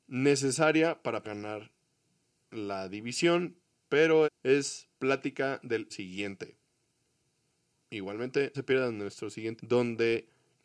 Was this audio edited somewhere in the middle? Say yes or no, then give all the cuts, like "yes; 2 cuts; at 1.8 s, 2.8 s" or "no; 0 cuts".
yes; 5 cuts; at 1.2 s, 4.2 s, 5.9 s, 8.5 s, 9.6 s